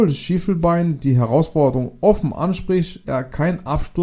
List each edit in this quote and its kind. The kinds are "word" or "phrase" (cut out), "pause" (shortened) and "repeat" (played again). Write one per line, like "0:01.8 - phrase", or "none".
0:03.0 - word